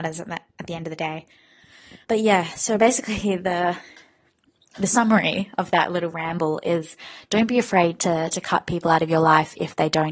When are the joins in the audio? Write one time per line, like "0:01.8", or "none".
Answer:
0:02.0